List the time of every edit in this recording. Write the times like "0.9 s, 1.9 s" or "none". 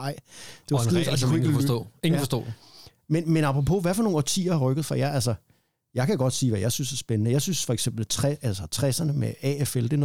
none